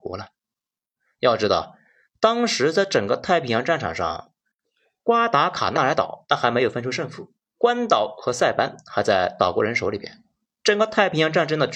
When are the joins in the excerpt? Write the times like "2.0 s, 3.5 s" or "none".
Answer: 7.4 s